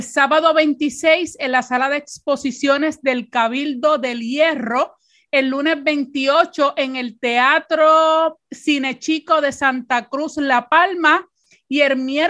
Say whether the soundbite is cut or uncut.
uncut